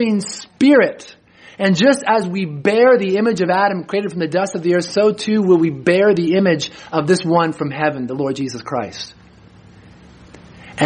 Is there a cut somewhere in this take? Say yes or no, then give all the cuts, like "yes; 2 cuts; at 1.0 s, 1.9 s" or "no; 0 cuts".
no; 0 cuts